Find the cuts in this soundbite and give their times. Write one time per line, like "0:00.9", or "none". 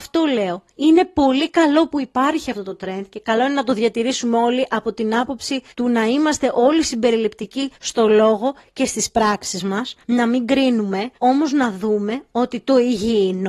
0:05.7
0:07.8
0:10.0
0:11.2